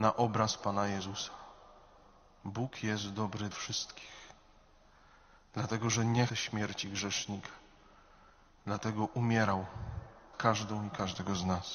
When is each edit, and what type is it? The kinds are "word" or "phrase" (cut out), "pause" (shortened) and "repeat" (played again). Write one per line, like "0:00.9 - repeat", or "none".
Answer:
0:03.5 - word
0:06.3 - word
0:10.3 - word